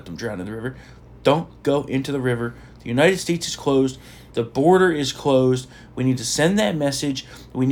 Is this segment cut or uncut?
uncut